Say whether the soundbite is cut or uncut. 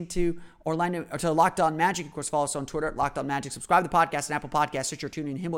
uncut